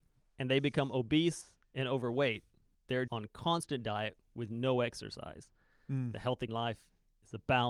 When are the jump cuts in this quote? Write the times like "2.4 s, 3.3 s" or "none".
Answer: 2.7 s, 3.1 s, 4.2 s, 6.5 s